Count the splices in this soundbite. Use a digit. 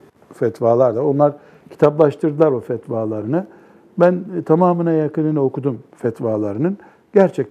0